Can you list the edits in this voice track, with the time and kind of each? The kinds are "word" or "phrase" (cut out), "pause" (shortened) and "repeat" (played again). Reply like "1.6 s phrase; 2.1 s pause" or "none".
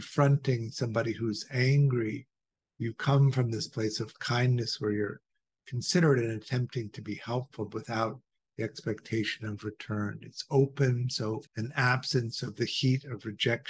11.5 s pause